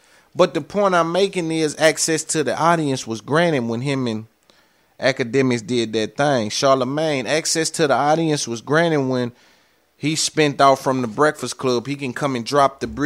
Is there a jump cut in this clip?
no; 0 cuts

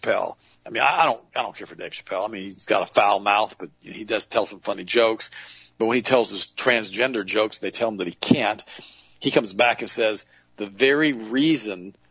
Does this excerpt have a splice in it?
no; 0 cuts

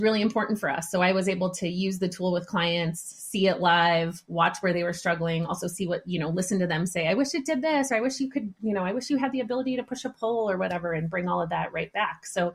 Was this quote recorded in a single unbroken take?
yes; 0 cuts

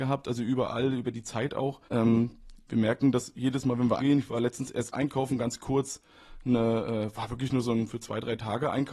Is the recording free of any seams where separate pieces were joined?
no; 2 cuts; at 1.9 s, 4.0 s

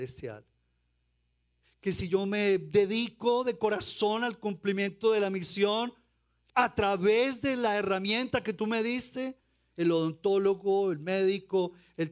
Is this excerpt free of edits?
yes; 0 cuts

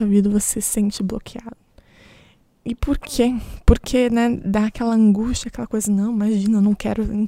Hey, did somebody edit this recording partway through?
no; 0 cuts

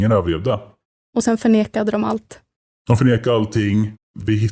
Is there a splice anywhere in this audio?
no; 0 cuts

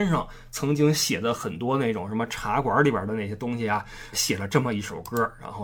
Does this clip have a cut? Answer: yes; 1 cut; at 4.1 s

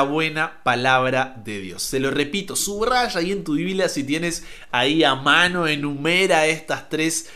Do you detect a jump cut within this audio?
no; 0 cuts

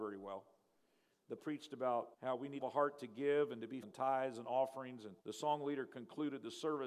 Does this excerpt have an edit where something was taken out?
yes; 5 cuts; at 1.4 s, 2.1 s, 2.6 s, 3.8 s, 5.2 s

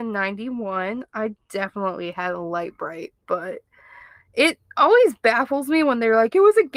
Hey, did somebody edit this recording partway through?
yes; 1 cut; at 3.2 s

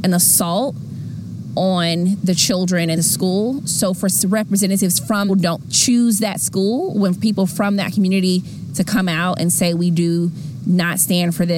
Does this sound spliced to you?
yes; 2 cuts; at 3.0 s, 5.3 s

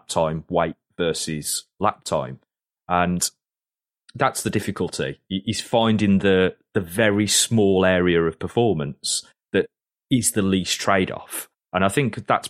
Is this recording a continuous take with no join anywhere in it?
yes; 0 cuts

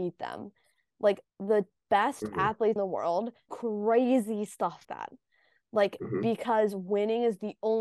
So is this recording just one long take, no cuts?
no; 4 cuts; at 1.3 s, 2.8 s, 3.5 s, 4.8 s

